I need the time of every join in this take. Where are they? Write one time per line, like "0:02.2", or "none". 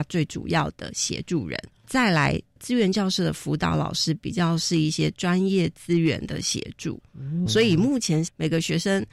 0:07.5

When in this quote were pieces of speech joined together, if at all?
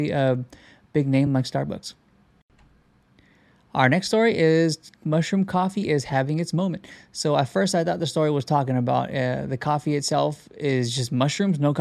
none

